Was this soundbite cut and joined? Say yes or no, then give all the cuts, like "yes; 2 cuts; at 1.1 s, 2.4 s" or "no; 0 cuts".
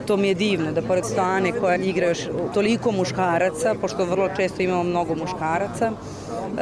yes; 3 cuts; at 1.0 s, 1.8 s, 2.5 s